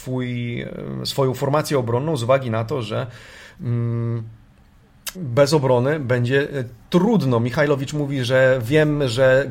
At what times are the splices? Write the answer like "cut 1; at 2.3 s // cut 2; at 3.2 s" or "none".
cut 1; at 5.1 s